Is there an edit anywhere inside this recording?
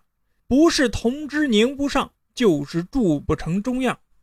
yes; 1 cut; at 2.2 s

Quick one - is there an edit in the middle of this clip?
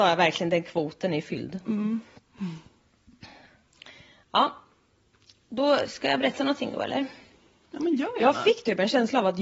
no; 0 cuts

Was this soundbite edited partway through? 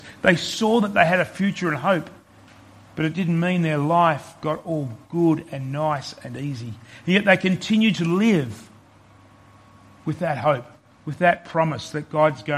no; 0 cuts

